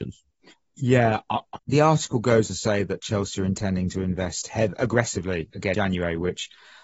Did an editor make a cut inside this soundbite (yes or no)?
yes